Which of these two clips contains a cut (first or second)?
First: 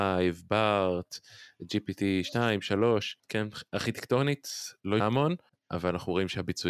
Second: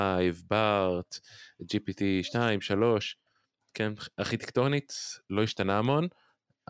first